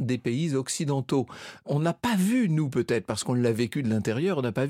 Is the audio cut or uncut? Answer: uncut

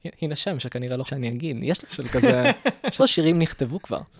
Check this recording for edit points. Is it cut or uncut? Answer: cut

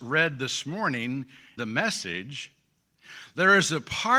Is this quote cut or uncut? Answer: cut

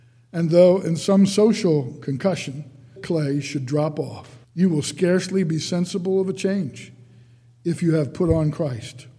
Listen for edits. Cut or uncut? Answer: cut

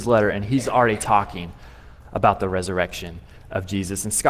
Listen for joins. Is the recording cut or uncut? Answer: uncut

